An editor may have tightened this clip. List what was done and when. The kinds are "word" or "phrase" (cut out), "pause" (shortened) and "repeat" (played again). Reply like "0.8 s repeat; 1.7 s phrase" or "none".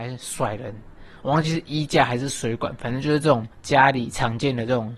3.5 s pause